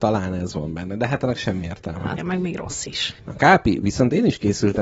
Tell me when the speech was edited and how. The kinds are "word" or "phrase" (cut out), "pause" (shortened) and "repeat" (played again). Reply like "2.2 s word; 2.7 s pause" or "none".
2.2 s word; 3.2 s pause